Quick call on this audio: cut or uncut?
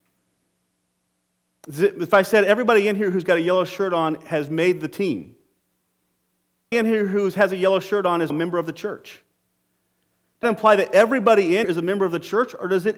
cut